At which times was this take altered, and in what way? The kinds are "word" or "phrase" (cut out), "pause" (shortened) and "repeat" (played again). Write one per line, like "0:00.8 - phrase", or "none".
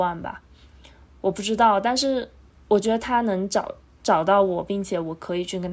none

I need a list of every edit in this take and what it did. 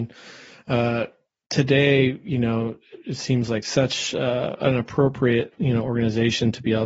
none

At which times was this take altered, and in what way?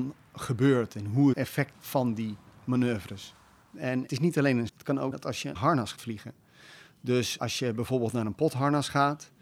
0:01.3 - word
0:01.7 - word
0:04.1 - word
0:04.7 - word
0:05.1 - word
0:05.5 - word
0:05.9 - word
0:07.4 - word

